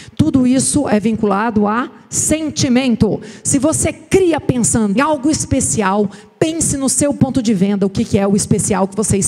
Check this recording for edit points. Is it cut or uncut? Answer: cut